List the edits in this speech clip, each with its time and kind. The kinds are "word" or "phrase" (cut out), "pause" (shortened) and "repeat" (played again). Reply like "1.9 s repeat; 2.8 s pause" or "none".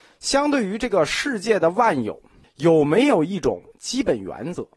2.4 s pause